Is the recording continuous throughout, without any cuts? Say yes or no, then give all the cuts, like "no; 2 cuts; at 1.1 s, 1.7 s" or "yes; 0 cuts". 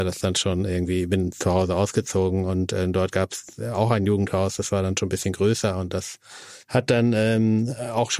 no; 1 cut; at 6.6 s